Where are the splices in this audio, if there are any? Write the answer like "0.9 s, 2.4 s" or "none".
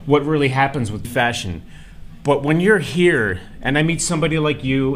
1.0 s